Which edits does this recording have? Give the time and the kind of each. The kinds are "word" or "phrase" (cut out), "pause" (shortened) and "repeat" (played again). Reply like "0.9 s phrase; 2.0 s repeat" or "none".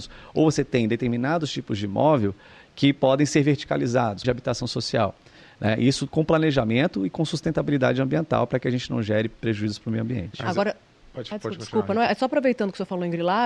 4.2 s phrase